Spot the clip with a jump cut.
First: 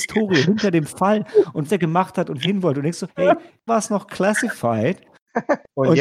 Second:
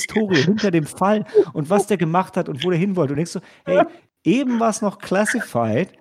first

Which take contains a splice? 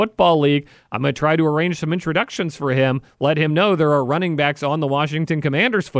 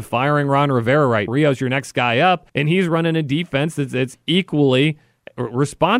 second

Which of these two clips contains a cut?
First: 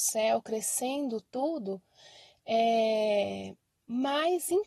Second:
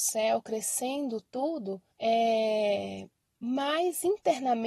second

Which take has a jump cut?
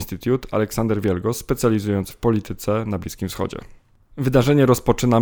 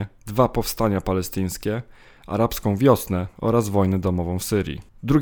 first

